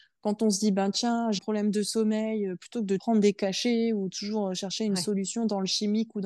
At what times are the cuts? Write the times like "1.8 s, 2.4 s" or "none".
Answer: 1.4 s, 3.0 s